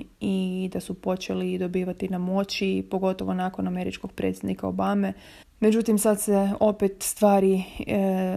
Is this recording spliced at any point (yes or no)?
yes